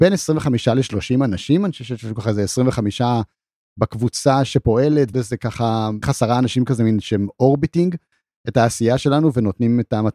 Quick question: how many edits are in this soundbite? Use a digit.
2